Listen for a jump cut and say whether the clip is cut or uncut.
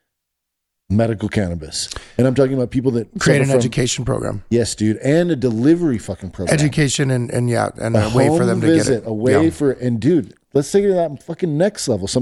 uncut